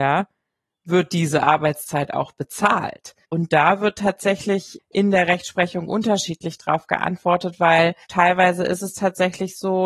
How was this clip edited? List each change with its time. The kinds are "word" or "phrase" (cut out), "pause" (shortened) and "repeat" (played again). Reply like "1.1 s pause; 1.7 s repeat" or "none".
3.2 s pause; 8.0 s pause